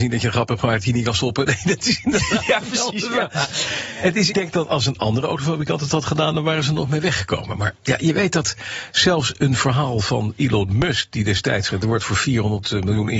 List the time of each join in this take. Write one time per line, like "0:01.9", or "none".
0:04.3
0:11.7

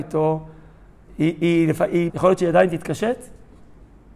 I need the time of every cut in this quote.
0:02.1

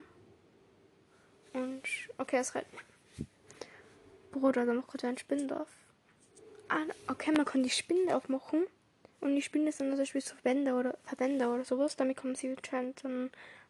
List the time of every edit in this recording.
none

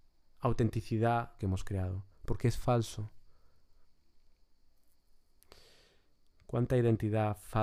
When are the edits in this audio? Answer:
0:01.4

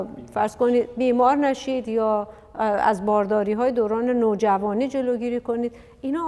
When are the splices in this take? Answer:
none

